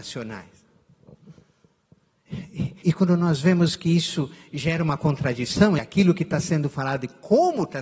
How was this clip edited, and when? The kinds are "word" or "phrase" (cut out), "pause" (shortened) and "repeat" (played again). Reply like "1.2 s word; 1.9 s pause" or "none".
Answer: 2.8 s word; 5.8 s word